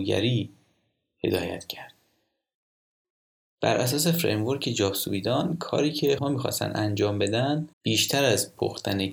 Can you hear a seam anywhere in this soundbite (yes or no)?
yes